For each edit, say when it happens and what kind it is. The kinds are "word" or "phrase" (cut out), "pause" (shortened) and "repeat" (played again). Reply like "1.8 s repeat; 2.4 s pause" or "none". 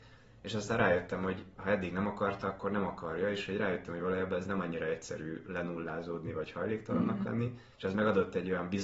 7.7 s pause